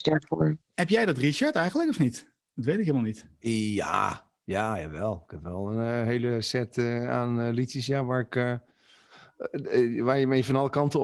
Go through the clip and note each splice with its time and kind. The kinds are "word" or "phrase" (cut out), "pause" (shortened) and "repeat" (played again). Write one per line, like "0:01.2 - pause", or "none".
none